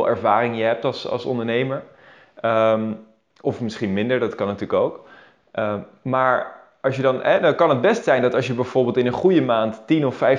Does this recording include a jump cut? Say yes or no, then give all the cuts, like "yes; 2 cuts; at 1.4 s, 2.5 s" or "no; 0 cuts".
no; 0 cuts